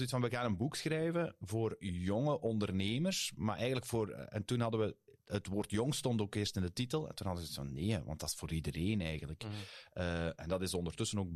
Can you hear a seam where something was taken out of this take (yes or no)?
no